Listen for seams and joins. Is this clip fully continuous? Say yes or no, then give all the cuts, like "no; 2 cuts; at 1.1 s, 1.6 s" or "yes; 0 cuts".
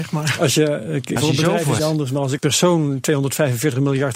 no; 3 cuts; at 1.2 s, 1.8 s, 2.4 s